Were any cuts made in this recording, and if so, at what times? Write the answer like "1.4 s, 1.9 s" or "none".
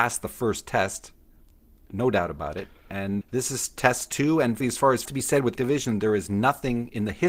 1.3 s, 3.2 s, 4.6 s, 5.0 s, 5.5 s